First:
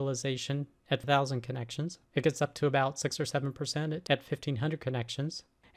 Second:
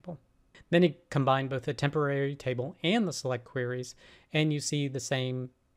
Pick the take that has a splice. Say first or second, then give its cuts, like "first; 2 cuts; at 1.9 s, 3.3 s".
first; 1 cut; at 2.1 s